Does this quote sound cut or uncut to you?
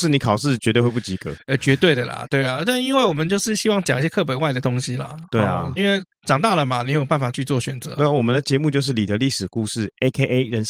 cut